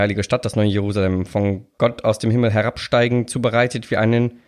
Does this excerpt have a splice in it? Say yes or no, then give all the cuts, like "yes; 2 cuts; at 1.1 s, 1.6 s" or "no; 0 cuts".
no; 0 cuts